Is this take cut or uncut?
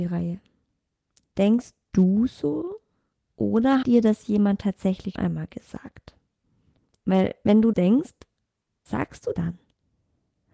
cut